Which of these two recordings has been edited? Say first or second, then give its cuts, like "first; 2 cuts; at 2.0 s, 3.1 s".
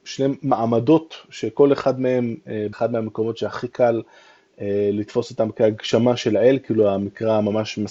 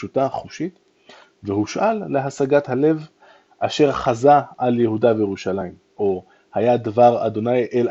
first; 1 cut; at 2.7 s